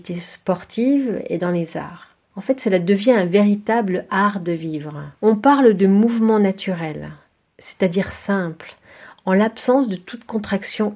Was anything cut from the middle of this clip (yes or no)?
yes